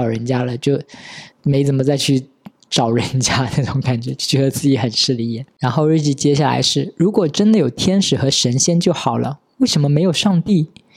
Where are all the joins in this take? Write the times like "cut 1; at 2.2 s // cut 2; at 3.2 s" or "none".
cut 1; at 1.3 s